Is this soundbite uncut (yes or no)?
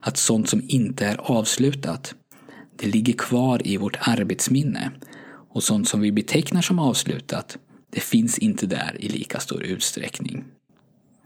yes